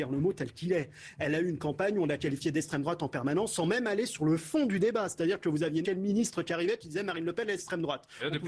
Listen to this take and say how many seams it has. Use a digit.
1